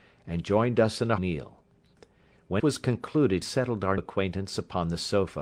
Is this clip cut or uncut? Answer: cut